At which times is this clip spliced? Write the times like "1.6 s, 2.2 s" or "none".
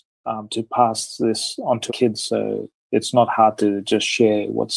1.9 s